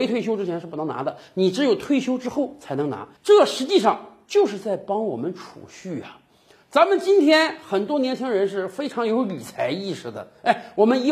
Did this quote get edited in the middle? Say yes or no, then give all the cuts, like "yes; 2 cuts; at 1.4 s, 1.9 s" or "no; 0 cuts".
yes; 1 cut; at 3.2 s